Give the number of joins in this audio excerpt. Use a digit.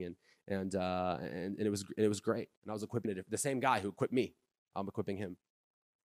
2